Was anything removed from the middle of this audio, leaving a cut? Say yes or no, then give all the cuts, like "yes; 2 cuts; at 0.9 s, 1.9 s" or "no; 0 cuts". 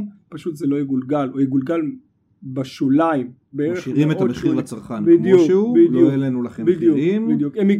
no; 0 cuts